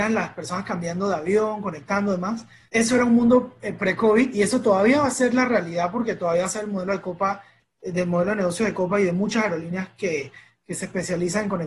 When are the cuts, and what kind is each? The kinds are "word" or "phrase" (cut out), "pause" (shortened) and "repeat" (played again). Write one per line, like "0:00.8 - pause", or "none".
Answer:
none